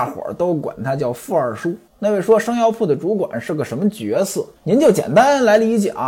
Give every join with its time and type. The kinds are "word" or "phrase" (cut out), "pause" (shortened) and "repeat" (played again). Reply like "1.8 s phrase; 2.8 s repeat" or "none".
1.9 s pause; 4.6 s pause